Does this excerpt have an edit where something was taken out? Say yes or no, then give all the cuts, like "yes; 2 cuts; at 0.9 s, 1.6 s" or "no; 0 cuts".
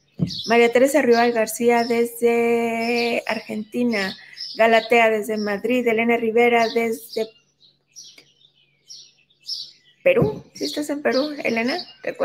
no; 0 cuts